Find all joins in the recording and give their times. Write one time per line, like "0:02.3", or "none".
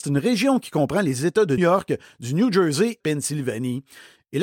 0:01.6
0:03.0